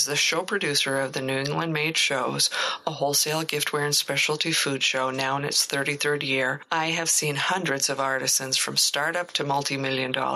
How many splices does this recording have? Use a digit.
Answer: 0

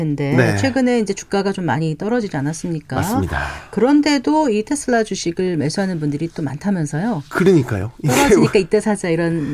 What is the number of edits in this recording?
0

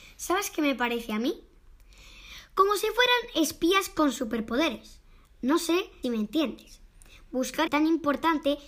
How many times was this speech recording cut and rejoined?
2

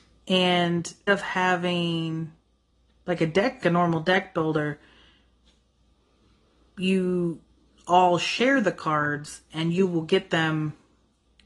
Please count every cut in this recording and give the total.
2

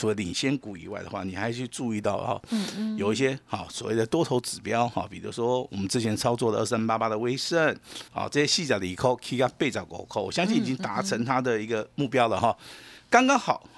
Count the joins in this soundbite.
1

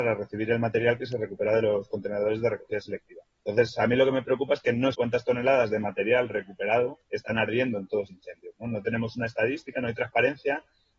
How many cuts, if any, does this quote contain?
4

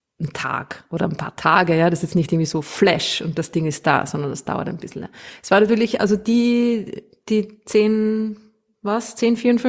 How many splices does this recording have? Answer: 0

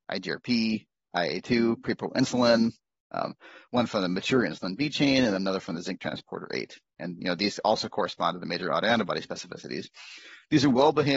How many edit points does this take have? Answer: 0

